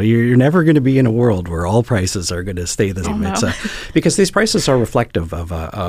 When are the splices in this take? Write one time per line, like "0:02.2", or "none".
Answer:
0:03.0